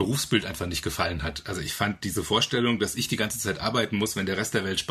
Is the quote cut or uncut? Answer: uncut